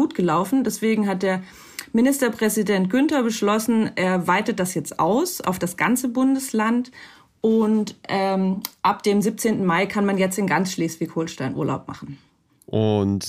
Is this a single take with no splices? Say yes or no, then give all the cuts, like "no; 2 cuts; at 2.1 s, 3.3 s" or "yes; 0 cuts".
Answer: yes; 0 cuts